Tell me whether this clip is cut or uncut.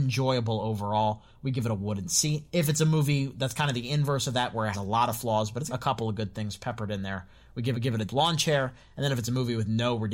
cut